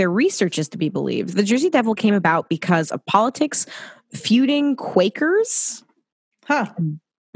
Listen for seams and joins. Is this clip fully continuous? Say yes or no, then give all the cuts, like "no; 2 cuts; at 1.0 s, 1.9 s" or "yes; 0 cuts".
yes; 0 cuts